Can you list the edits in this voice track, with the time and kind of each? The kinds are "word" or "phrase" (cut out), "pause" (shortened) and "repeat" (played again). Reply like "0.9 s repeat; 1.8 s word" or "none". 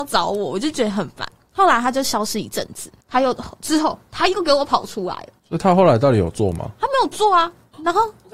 3.0 s pause; 5.4 s pause

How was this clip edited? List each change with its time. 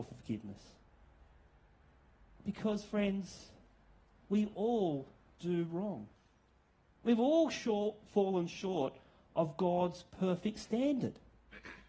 none

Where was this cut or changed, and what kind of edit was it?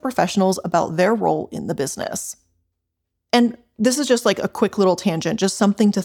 none

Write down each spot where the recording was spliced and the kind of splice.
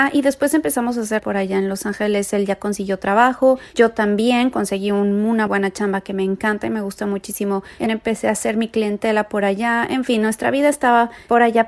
1.2 s phrase; 5.5 s word; 7.9 s phrase

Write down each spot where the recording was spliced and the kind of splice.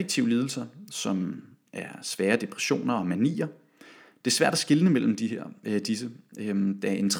none

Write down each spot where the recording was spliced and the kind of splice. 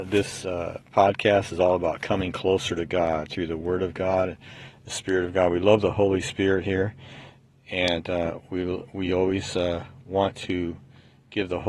none

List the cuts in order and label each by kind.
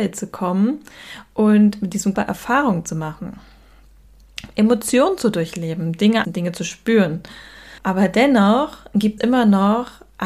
2.1 s word; 6.2 s word; 7.8 s pause; 9.2 s word

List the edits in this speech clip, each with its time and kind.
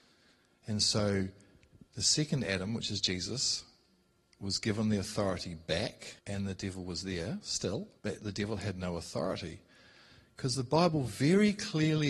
6.2 s pause; 8.0 s pause

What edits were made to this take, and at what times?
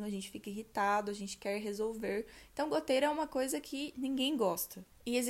none

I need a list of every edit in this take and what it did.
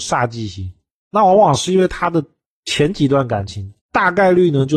3.8 s pause

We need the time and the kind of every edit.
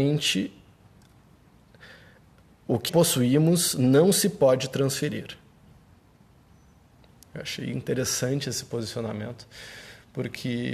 2.9 s word

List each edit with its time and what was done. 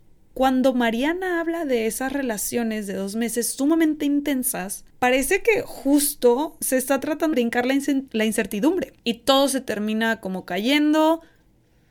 4.9 s pause; 7.3 s word; 8.1 s word; 9.0 s pause

